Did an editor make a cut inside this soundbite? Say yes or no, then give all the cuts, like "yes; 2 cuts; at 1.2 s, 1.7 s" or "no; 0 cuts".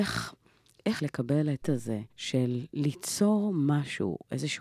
yes; 3 cuts; at 1.0 s, 1.6 s, 2.1 s